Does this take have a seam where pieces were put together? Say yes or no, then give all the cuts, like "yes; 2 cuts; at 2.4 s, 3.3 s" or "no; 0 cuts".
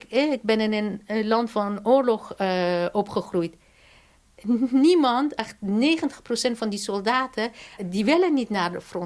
yes; 1 cut; at 7.8 s